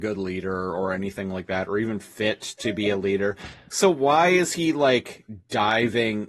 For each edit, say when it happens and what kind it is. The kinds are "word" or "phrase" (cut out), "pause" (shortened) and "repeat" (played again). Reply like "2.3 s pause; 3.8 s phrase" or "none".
none

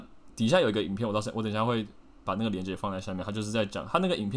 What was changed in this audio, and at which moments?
none

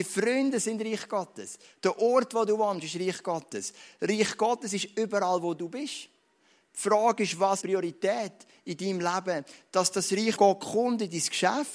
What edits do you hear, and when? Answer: 7.6 s word; 10.4 s word

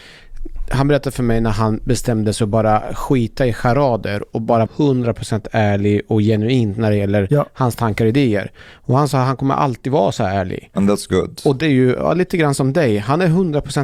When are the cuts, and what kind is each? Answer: 4.7 s word; 11.6 s phrase

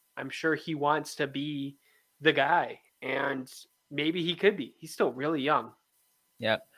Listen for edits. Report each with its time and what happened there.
none

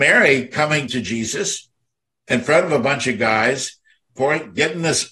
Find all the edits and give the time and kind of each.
none

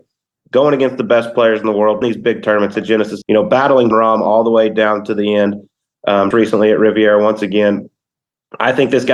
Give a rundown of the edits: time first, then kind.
2.0 s word; 2.7 s word; 3.2 s word; 3.9 s word; 6.3 s word

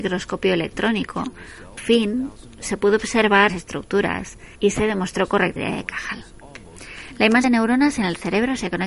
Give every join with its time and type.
1.8 s word; 3.5 s word; 4.5 s pause; 5.6 s word; 7.4 s word

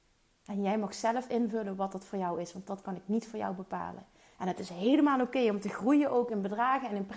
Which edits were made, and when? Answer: none

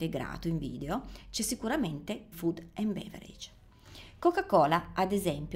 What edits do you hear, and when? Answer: 2.3 s word

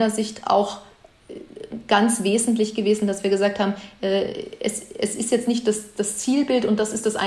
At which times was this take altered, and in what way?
none

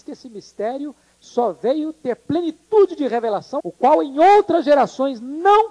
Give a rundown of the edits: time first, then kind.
3.6 s word

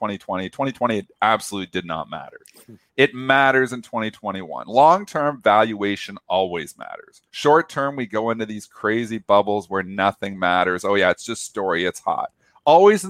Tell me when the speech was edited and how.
7.3 s pause

